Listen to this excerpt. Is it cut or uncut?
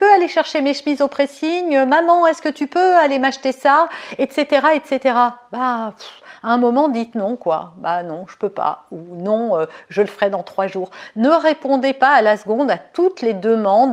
uncut